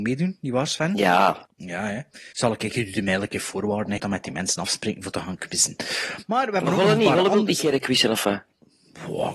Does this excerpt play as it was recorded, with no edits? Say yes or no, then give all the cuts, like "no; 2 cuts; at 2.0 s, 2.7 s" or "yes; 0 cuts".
no; 2 cuts; at 2.3 s, 4.0 s